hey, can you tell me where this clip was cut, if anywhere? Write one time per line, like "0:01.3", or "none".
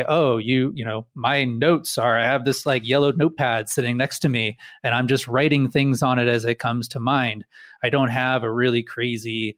none